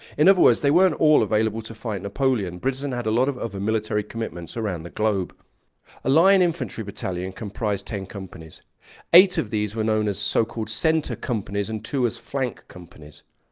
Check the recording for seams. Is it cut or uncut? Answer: uncut